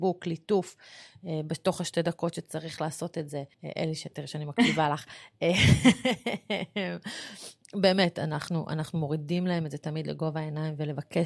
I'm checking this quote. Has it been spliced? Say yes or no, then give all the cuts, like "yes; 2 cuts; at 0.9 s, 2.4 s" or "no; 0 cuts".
yes; 1 cut; at 3.5 s